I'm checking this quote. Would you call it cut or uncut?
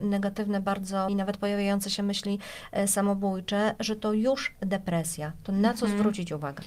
cut